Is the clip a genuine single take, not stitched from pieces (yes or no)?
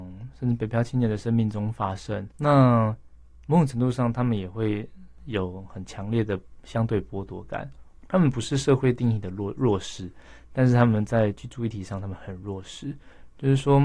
no